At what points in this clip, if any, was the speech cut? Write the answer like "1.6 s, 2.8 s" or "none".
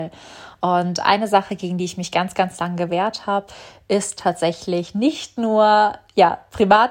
none